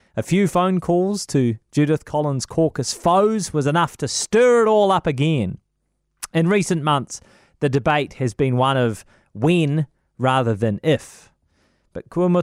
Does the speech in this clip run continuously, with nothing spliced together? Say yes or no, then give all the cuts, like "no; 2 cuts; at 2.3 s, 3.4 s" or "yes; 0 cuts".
yes; 0 cuts